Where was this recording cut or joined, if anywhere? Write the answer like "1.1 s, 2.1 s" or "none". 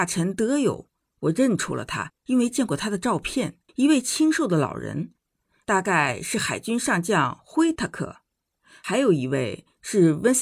2.2 s, 3.7 s